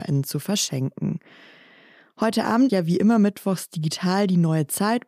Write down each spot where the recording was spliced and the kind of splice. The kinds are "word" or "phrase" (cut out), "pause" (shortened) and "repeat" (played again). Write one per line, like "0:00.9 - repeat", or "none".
0:02.7 - word